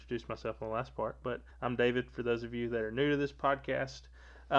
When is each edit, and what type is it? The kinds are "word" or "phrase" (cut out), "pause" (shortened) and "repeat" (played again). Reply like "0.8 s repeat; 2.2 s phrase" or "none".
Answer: 1.5 s pause